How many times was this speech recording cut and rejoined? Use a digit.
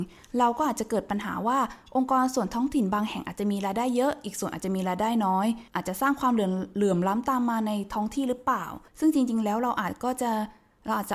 2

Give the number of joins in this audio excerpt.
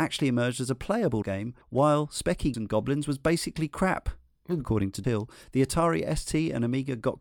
4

